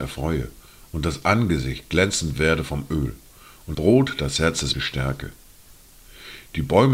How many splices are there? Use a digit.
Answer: 2